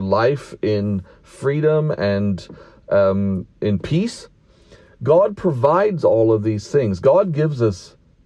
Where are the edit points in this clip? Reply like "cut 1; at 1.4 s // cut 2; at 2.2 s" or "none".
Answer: none